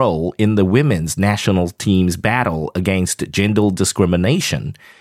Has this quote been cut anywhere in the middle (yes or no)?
no